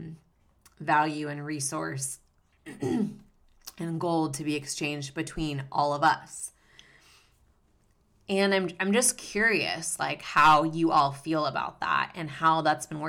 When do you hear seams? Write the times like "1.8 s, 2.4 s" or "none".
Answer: none